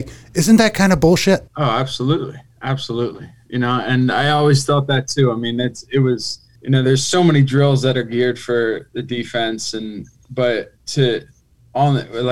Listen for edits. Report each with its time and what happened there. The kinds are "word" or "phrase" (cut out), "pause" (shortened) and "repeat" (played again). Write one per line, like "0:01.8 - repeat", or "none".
0:01.5 - pause
0:06.6 - pause
0:10.8 - pause